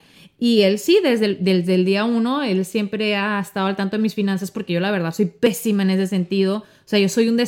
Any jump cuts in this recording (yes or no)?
no